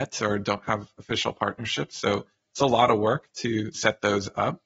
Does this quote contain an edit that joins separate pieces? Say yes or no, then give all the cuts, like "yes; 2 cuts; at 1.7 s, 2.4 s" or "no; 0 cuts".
no; 0 cuts